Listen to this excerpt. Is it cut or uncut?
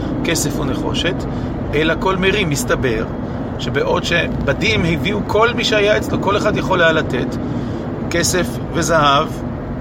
uncut